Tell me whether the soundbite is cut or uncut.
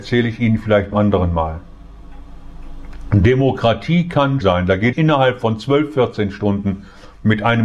cut